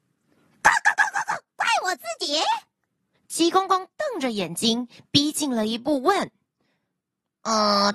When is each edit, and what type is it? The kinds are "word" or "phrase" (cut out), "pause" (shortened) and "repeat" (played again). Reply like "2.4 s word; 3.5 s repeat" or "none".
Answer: none